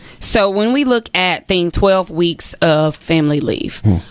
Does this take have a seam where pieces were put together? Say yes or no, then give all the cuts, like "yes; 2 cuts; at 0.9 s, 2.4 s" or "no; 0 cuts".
yes; 2 cuts; at 1.7 s, 3.0 s